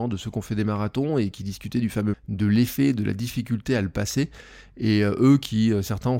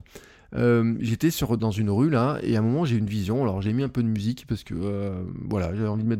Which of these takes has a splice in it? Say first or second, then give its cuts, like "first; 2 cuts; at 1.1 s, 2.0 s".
first; 1 cut; at 2.1 s